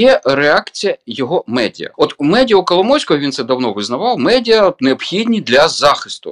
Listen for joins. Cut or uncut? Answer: cut